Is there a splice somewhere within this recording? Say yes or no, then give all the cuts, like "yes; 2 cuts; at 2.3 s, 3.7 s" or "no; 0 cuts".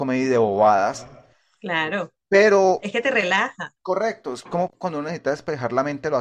no; 0 cuts